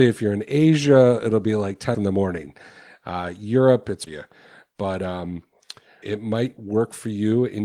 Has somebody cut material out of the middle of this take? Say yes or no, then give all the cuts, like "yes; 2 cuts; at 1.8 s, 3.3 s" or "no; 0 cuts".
yes; 3 cuts; at 1.9 s, 4.1 s, 6.0 s